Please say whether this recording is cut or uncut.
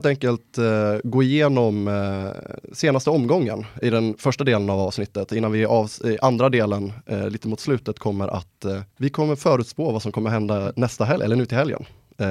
cut